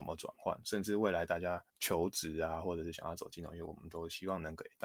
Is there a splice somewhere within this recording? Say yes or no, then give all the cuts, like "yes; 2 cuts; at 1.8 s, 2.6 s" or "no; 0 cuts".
yes; 1 cut; at 1.7 s